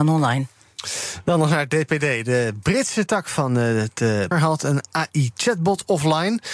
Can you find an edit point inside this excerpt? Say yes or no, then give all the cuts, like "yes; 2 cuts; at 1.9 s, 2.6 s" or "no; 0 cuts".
yes; 1 cut; at 4.3 s